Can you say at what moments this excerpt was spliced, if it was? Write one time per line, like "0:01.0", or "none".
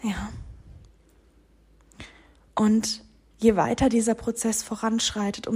none